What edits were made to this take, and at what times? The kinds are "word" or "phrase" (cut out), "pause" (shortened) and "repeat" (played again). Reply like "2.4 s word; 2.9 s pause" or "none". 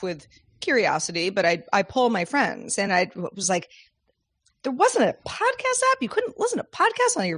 none

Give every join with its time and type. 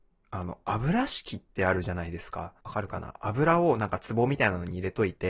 1.5 s pause; 2.6 s pause

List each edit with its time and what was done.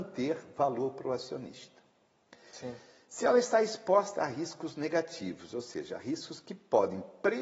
none

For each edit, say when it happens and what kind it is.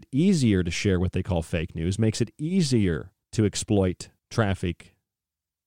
3.2 s pause; 4.2 s pause

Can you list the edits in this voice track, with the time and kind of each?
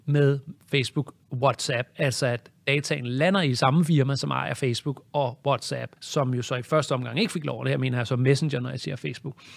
6.0 s pause

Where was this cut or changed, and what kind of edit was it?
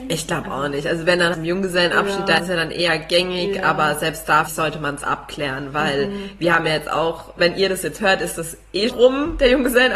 1.3 s word; 2.4 s word; 4.5 s word; 7.4 s word; 8.9 s word

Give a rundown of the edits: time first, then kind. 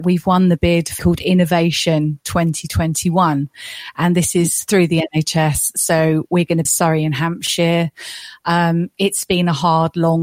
1.0 s word; 6.7 s phrase

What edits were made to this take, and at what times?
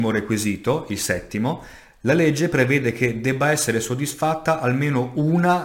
none

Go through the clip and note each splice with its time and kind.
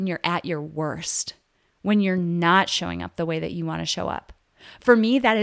none

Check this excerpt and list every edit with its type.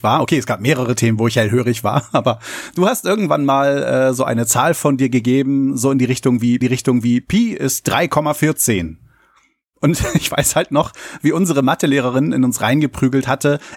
6.6 s repeat

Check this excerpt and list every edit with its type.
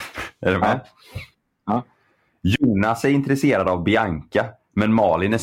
none

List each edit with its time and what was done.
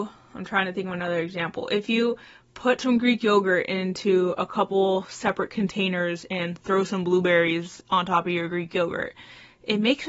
none

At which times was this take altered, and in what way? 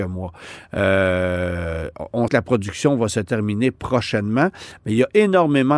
2.3 s word

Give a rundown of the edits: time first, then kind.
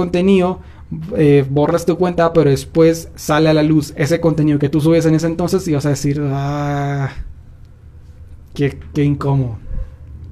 none

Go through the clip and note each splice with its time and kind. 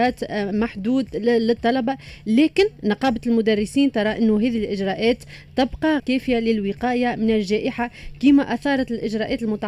6.0 s word

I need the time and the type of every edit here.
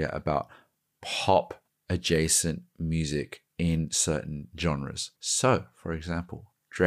1.7 s pause; 5.1 s pause

